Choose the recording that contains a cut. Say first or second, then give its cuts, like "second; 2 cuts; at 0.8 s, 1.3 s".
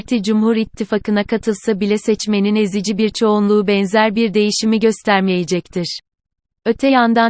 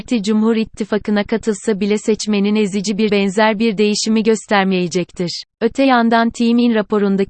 second; 2 cuts; at 3.1 s, 5.5 s